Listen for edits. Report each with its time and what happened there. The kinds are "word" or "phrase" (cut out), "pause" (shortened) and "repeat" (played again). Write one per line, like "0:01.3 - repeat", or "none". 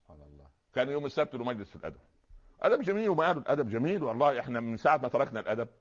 none